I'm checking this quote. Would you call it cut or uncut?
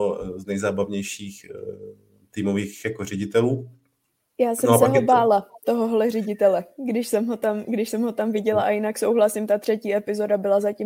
uncut